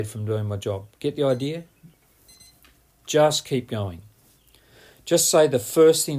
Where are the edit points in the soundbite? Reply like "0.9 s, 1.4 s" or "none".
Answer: none